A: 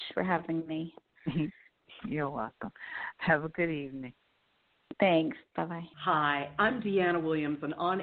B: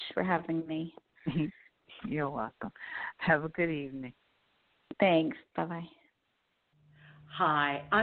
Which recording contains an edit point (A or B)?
A